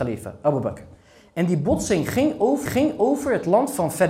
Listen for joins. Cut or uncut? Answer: cut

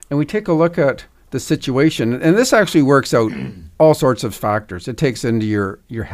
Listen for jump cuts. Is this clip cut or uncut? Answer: uncut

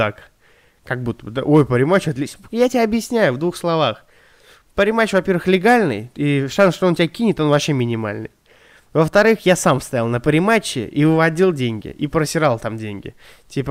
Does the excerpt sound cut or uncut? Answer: uncut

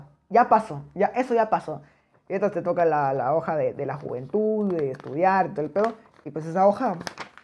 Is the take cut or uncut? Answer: uncut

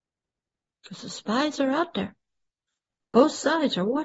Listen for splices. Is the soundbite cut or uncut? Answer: uncut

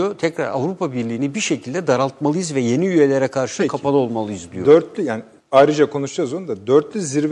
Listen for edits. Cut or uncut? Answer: cut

